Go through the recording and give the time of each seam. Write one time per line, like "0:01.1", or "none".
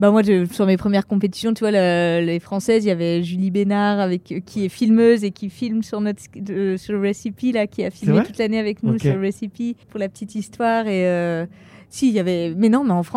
0:09.8

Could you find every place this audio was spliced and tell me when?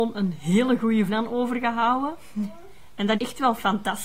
0:01.1
0:03.1

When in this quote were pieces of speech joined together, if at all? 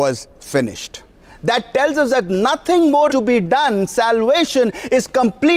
0:01.2
0:03.1

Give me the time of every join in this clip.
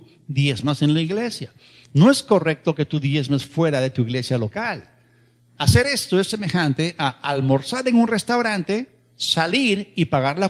none

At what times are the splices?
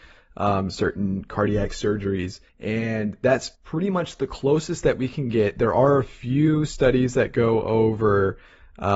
0:02.5
0:03.5

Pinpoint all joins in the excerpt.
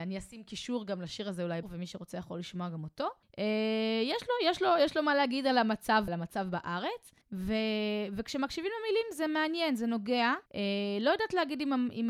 0:01.6
0:03.2
0:06.1
0:07.2
0:10.5

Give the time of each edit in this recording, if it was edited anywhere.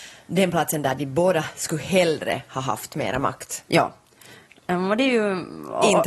none

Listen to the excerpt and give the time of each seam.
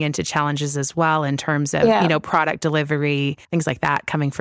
0:03.4

